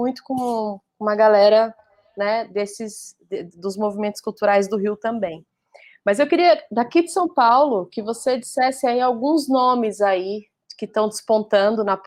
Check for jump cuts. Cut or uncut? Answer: uncut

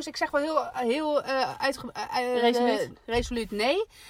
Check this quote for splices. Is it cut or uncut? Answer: uncut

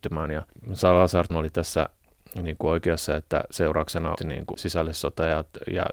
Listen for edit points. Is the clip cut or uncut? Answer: cut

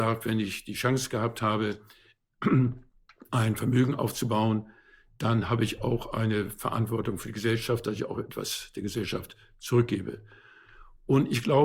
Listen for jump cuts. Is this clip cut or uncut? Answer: cut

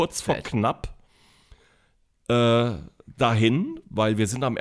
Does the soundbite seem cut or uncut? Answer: uncut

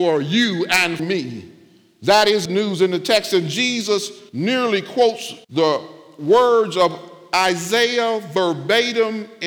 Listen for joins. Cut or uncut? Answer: cut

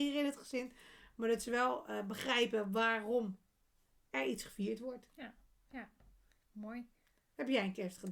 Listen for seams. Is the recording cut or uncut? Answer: uncut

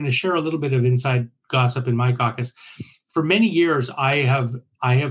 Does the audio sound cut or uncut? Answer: uncut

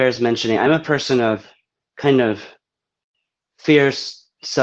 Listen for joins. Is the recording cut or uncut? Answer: uncut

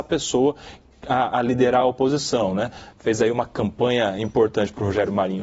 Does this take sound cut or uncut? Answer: uncut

